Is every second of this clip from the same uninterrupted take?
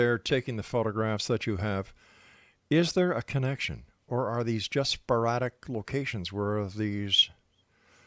yes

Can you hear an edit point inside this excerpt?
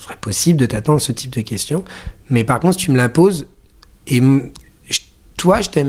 no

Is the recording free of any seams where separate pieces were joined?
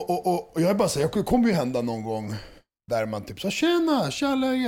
yes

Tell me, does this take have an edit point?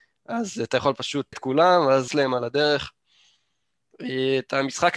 yes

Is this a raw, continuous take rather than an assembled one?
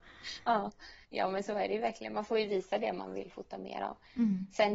no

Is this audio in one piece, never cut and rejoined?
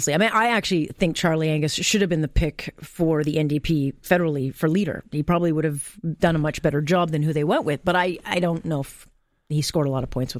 yes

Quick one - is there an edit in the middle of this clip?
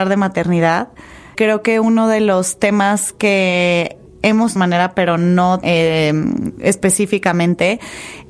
yes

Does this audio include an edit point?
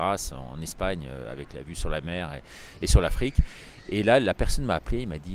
no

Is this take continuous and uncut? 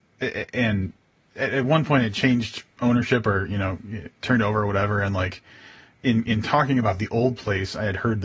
yes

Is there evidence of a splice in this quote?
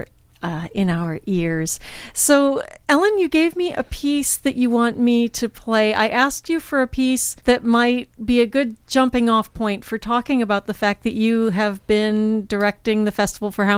yes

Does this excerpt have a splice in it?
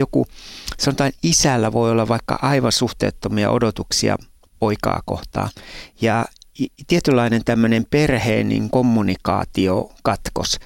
yes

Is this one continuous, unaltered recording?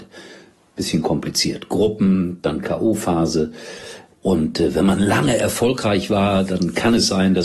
yes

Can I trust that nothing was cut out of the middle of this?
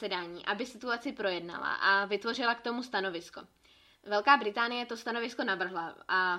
yes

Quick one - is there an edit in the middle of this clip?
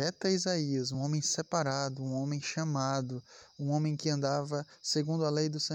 no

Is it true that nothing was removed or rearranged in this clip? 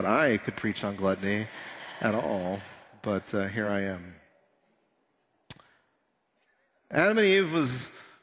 yes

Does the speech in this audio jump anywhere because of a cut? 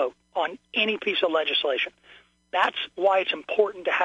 no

